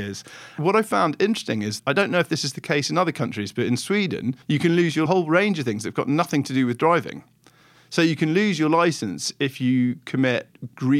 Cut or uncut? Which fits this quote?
cut